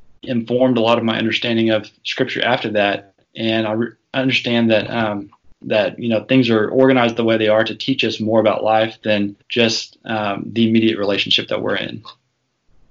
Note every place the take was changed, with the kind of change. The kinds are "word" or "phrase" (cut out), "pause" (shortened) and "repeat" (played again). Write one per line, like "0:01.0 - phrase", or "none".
0:03.2 - pause
0:05.4 - pause
0:09.4 - pause